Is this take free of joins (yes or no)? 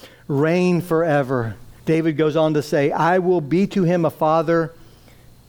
no